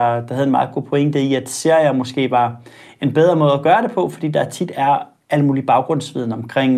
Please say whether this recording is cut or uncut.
uncut